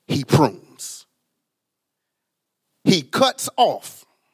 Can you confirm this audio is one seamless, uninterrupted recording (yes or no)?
yes